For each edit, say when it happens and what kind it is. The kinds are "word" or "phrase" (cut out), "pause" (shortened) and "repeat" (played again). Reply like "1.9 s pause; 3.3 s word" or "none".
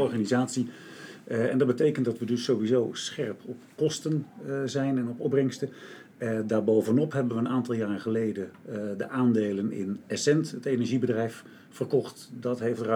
none